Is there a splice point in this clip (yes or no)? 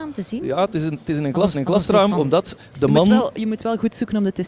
yes